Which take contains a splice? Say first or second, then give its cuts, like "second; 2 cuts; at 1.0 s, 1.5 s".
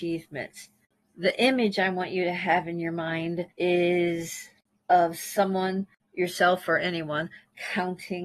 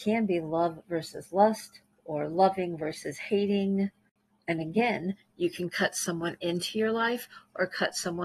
first; 1 cut; at 3.5 s